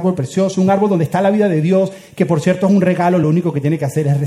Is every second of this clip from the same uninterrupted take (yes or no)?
yes